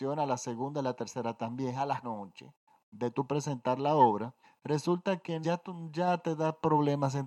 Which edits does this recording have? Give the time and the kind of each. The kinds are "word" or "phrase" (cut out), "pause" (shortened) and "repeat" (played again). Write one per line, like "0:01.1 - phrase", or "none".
0:02.0 - word
0:04.4 - pause
0:05.4 - word